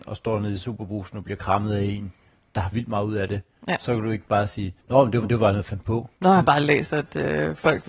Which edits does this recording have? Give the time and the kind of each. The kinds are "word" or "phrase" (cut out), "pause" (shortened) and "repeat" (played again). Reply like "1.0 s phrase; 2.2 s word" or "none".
2.7 s word; 5.2 s repeat; 6.1 s pause